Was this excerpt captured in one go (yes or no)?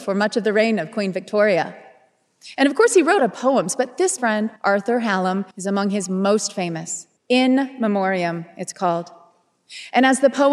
no